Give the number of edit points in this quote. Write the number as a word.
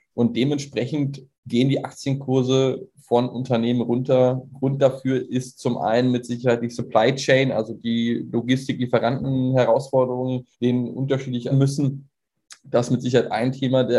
three